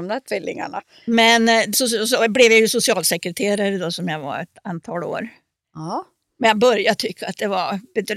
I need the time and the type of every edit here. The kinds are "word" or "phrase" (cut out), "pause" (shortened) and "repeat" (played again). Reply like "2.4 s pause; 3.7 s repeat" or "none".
1.7 s word